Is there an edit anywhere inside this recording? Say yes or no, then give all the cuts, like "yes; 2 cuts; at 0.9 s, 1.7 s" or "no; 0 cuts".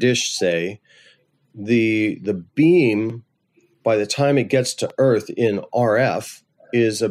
no; 0 cuts